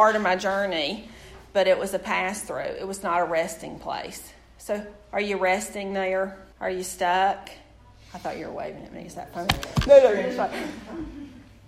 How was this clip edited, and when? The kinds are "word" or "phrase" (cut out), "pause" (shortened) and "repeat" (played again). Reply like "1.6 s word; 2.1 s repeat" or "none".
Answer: 6.5 s pause